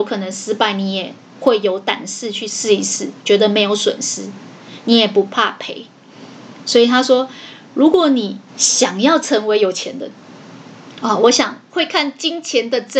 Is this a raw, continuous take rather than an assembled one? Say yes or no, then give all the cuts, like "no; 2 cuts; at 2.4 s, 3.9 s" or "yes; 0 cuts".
no; 1 cut; at 8.5 s